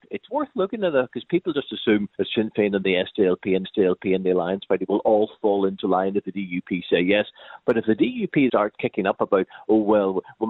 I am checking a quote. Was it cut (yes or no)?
yes